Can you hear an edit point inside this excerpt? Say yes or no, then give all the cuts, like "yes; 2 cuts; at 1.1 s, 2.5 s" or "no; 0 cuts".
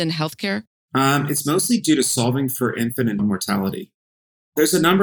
yes; 1 cut; at 3.2 s